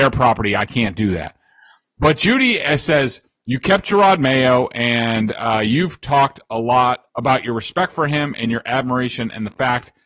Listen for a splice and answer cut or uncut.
cut